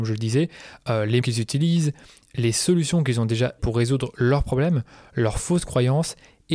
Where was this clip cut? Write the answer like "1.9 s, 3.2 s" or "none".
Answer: 1.2 s, 3.6 s